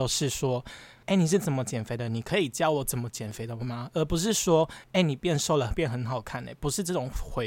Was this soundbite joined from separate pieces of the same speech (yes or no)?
yes